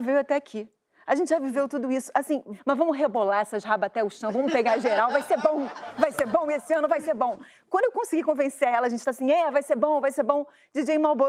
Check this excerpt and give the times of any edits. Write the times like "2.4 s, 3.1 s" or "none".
none